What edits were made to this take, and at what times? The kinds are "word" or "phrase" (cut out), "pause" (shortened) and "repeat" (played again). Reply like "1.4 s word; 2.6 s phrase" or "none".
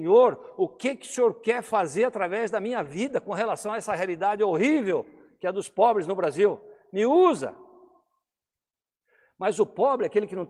none

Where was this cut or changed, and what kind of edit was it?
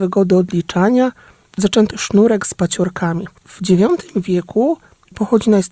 1.9 s word; 3.4 s pause

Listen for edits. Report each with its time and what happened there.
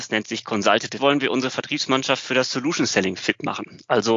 1.0 s phrase

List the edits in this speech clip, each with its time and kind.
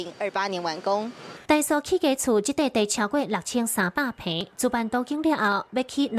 1.4 s pause

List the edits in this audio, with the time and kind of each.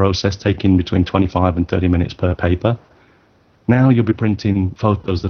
none

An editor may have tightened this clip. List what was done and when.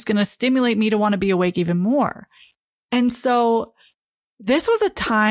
none

